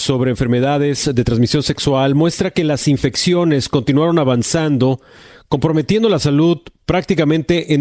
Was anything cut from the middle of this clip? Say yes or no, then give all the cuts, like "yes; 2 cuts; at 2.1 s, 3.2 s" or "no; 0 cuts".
no; 0 cuts